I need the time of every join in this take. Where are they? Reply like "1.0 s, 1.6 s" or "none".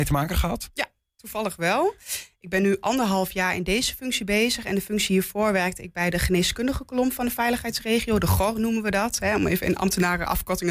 none